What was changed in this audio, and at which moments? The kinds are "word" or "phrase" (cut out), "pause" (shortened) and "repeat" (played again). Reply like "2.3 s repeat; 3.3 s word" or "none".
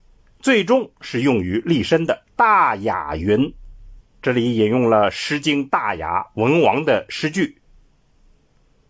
2.2 s pause; 4.0 s pause